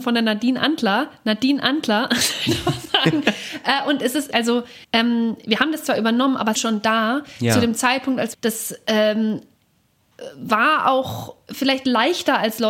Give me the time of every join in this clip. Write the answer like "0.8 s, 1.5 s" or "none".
4.3 s, 4.8 s, 6.5 s, 8.3 s